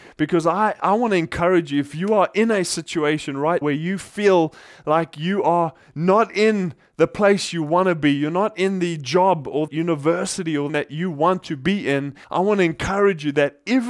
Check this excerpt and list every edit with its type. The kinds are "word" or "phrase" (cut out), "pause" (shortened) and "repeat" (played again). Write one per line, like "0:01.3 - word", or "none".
0:03.6 - word
0:09.7 - word
0:10.7 - phrase
0:12.2 - pause